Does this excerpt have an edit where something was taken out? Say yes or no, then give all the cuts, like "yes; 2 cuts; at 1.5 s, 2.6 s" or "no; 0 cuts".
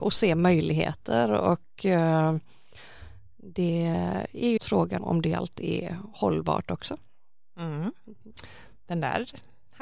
yes; 2 cuts; at 4.6 s, 5.0 s